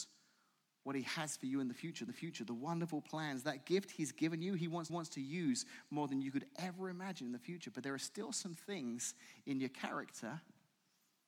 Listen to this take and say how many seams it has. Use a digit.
2